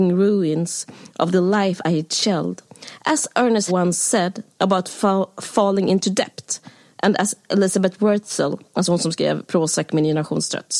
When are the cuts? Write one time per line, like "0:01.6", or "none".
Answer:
0:03.7
0:04.5